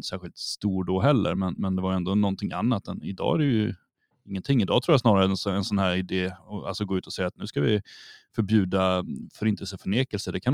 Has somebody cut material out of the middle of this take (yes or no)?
no